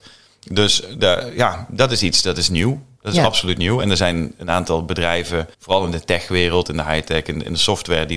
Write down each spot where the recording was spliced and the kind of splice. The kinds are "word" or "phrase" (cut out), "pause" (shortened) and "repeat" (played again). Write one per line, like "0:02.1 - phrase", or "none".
0:03.0 - pause
0:05.5 - pause